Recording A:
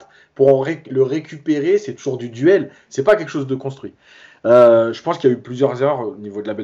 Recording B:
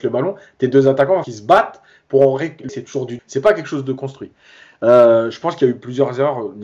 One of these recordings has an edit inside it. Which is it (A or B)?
B